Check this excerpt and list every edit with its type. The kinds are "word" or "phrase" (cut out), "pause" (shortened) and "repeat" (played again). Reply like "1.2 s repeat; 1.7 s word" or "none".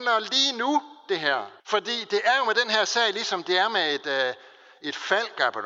1.6 s pause